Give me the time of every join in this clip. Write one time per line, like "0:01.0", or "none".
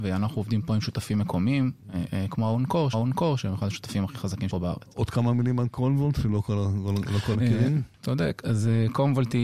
0:02.9
0:04.5
0:07.3